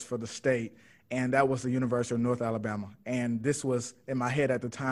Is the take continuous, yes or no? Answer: yes